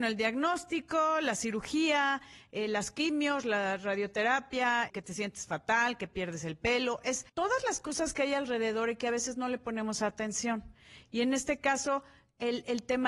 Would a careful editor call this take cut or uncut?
cut